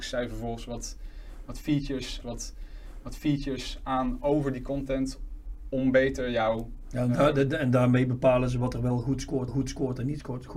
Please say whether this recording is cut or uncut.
cut